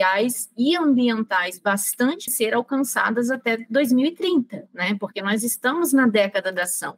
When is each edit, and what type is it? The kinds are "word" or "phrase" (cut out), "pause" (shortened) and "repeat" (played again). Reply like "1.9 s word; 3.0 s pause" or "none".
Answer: 2.3 s phrase